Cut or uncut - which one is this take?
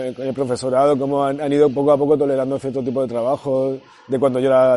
uncut